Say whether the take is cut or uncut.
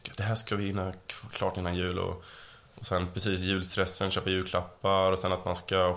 uncut